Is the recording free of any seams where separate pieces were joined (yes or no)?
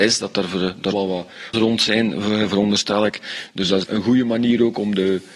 no